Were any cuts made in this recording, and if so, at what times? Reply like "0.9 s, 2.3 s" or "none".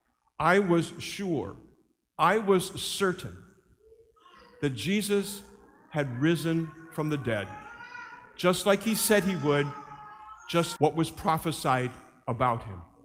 10.8 s